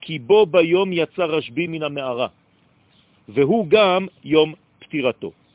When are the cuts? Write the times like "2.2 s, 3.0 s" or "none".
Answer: none